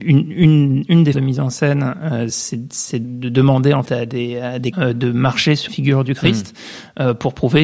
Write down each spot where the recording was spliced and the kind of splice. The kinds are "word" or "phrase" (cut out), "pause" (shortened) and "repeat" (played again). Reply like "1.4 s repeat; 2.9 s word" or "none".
1.1 s word; 2.3 s word; 3.0 s word; 3.8 s word; 4.7 s word; 5.7 s word